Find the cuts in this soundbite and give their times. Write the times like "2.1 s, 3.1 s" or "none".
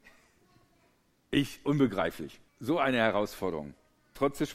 2.5 s